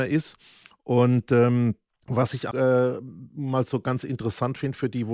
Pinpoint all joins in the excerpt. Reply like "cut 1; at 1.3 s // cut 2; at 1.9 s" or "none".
cut 1; at 1.9 s // cut 2; at 2.5 s